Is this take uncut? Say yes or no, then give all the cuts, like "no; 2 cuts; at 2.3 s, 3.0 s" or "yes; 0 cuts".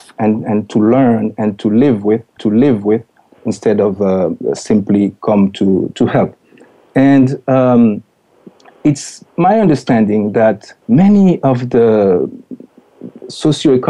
no; 4 cuts; at 2.4 s, 5.9 s, 9.3 s, 10.8 s